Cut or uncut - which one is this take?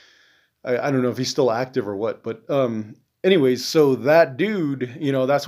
uncut